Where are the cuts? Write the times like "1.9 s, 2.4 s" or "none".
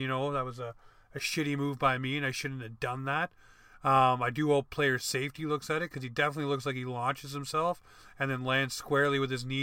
none